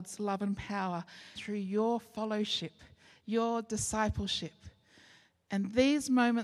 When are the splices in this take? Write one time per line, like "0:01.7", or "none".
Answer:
0:01.3